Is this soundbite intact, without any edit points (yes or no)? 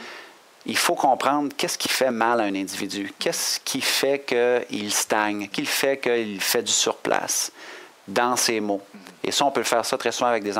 no